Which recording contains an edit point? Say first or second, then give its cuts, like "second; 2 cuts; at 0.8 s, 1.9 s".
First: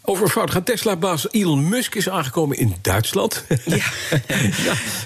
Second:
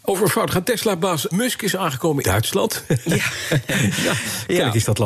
second; 2 cuts; at 1.3 s, 2.2 s